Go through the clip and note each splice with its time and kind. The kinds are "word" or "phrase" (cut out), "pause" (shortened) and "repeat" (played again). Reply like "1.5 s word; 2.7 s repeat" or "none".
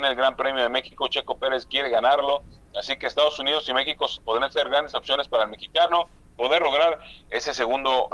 6.3 s word